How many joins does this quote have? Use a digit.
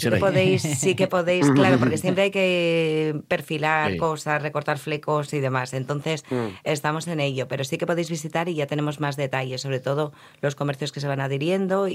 0